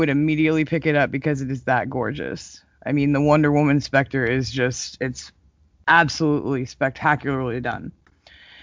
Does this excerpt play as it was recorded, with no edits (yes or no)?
yes